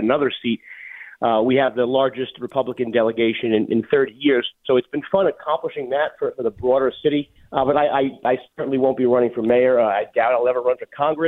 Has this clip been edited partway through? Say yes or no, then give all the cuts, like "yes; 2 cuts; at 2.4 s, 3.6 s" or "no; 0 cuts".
yes; 1 cut; at 7.4 s